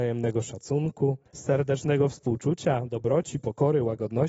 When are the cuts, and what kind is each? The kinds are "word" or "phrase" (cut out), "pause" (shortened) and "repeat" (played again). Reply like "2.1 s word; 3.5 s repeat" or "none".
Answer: 1.3 s pause